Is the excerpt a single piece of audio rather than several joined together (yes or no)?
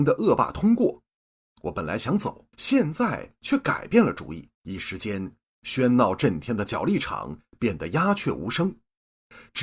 no